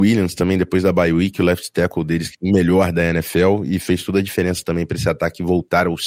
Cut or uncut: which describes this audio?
cut